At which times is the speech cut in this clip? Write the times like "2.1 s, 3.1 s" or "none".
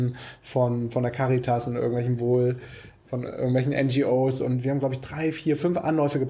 3.0 s